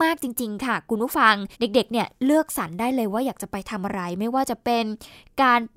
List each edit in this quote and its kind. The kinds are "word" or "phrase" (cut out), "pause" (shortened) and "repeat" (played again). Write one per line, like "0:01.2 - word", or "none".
0:01.5 - pause